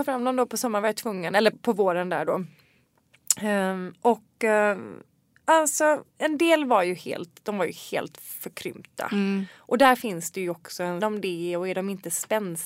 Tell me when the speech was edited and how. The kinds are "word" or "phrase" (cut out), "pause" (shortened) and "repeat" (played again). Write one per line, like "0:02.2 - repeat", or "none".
0:01.5 - word
0:06.1 - pause
0:11.0 - phrase